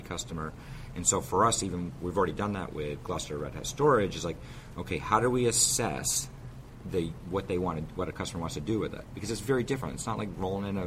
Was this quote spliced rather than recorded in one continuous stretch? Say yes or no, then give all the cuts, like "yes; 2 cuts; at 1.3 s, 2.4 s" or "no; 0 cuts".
no; 0 cuts